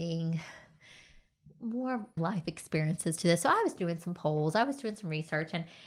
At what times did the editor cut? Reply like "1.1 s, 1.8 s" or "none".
2.2 s